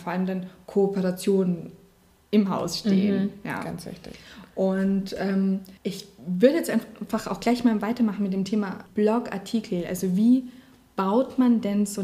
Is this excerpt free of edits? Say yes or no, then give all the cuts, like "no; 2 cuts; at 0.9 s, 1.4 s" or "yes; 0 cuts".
no; 2 cuts; at 5.8 s, 8.9 s